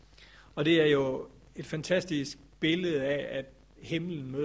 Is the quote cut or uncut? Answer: uncut